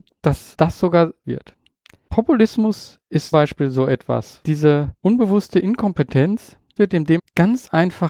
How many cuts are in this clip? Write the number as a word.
five